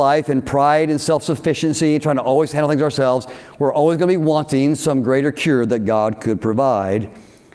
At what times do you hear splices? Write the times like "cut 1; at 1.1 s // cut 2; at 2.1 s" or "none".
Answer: none